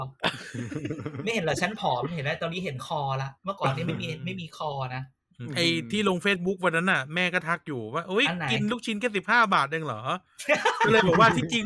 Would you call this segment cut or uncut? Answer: cut